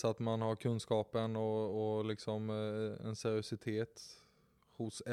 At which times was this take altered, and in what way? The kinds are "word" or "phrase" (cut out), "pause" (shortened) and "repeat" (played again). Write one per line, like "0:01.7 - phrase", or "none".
none